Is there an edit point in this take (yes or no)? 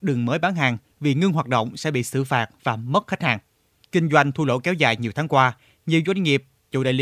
no